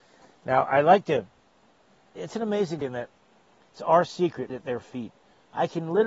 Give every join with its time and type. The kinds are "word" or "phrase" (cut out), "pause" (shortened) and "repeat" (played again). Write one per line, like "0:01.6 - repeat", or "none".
0:02.8 - word
0:03.7 - word
0:04.5 - word